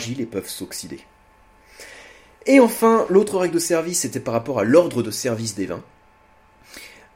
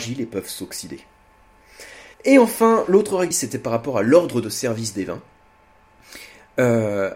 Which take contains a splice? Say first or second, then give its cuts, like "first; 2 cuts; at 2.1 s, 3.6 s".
second; 2 cuts; at 2.1 s, 3.3 s